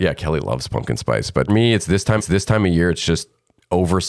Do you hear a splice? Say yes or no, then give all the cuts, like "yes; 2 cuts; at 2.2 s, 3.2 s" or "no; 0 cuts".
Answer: yes; 2 cuts; at 1.5 s, 2.2 s